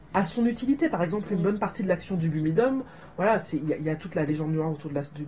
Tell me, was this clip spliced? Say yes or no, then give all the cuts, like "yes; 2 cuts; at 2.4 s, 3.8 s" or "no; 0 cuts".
no; 0 cuts